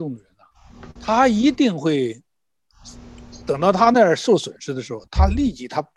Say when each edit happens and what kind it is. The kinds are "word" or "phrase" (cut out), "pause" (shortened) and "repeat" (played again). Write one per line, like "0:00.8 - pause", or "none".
0:01.0 - word